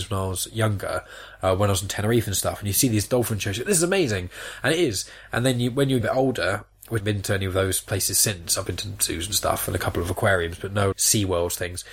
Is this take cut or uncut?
cut